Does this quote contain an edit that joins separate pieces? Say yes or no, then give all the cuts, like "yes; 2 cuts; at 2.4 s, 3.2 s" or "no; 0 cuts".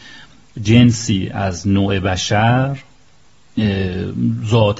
no; 0 cuts